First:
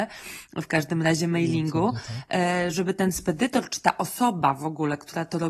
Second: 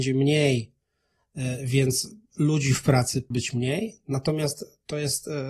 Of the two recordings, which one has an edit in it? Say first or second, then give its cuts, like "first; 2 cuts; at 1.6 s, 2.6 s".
second; 1 cut; at 3.3 s